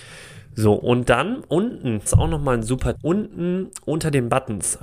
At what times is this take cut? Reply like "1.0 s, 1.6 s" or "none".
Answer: 2.1 s, 2.9 s